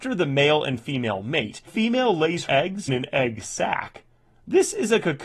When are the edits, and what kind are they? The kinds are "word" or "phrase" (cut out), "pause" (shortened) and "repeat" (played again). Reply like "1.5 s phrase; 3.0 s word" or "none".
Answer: 1.7 s word; 2.5 s word; 2.9 s word